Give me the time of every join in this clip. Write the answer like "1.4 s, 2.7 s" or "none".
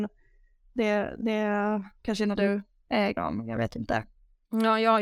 2.4 s, 3.2 s